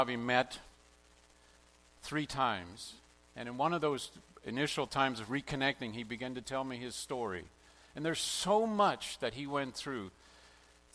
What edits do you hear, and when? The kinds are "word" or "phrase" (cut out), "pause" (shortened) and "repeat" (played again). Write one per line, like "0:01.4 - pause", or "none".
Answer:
none